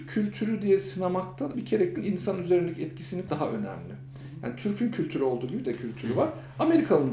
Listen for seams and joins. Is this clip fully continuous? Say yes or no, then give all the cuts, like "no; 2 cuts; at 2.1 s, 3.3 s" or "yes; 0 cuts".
no; 4 cuts; at 1.5 s, 2.0 s, 3.3 s, 5.6 s